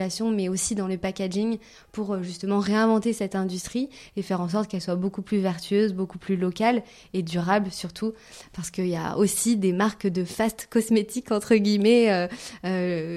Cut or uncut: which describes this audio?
uncut